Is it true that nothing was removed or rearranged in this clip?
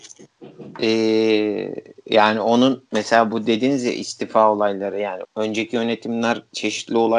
no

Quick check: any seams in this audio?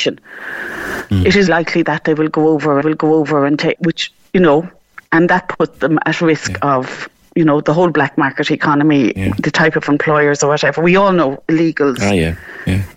yes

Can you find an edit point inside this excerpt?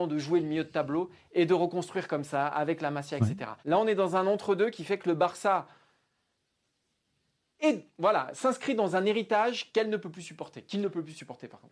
yes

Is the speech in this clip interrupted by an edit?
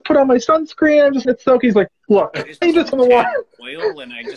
yes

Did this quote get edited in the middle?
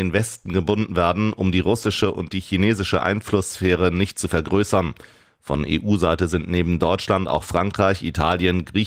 no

